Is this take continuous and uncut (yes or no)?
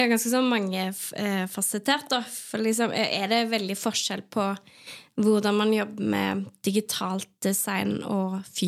yes